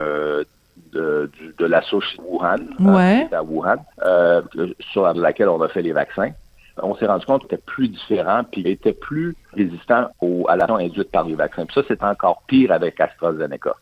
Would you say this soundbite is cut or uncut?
cut